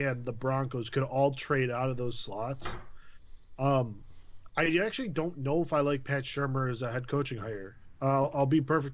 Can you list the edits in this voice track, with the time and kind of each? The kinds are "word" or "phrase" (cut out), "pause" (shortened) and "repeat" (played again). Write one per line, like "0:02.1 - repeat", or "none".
none